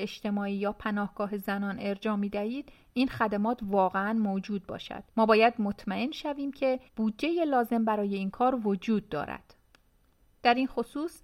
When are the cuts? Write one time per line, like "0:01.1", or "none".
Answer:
0:05.1
0:06.9